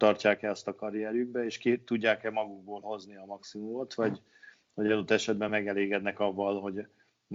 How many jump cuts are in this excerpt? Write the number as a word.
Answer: zero